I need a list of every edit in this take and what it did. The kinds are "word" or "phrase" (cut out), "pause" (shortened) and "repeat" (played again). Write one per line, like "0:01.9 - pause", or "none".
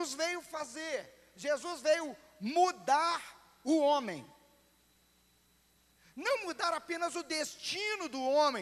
none

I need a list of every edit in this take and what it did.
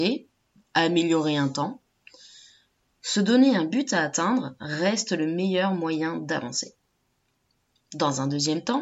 none

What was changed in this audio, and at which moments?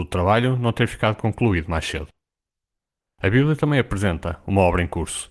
none

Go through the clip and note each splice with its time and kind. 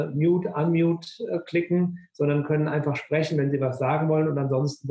none

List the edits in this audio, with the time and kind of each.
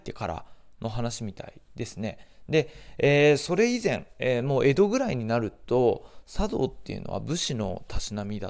0:01.7 - pause

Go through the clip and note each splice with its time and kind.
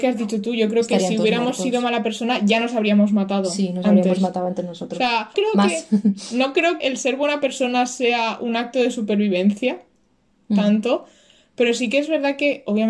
0:05.3 - word
0:06.8 - word

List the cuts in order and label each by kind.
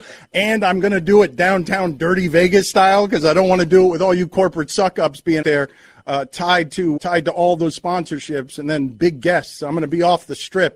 0:05.4 - word
0:07.0 - word

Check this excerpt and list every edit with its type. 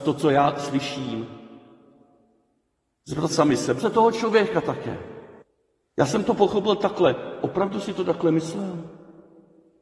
0:03.3 - word
0:03.8 - phrase
0:05.4 - pause

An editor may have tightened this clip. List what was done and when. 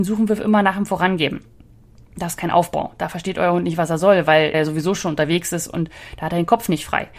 0:04.5 - word

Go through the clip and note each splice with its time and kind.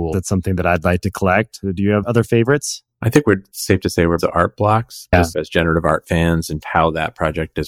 0:04.2 - phrase
0:06.6 - word

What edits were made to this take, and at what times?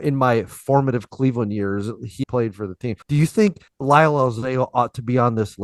0:02.2 - word
0:03.0 - pause
0:03.7 - pause

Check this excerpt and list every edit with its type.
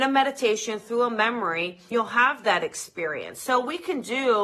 0:01.9 - word

